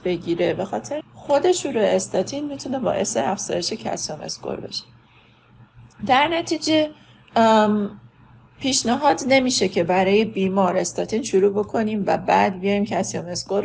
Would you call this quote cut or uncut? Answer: cut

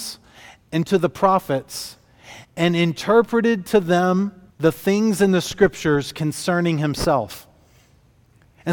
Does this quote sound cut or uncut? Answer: cut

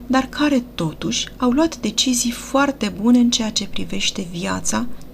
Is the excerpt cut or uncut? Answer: uncut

